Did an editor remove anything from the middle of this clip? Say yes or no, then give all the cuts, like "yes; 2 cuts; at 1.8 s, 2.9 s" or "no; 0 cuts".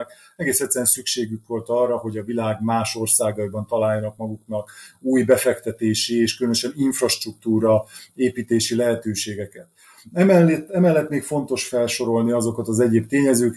no; 0 cuts